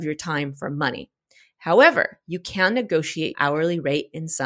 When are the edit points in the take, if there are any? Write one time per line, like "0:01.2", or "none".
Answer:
0:03.3